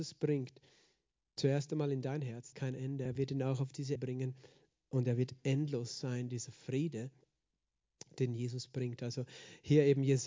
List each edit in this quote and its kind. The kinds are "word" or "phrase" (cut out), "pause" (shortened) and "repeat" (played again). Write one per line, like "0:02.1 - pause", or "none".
0:02.5 - word
0:03.1 - word
0:04.0 - word